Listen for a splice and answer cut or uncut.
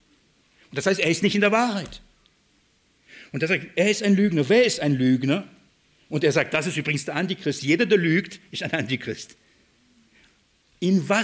uncut